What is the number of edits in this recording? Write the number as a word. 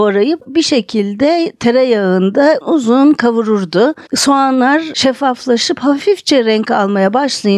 two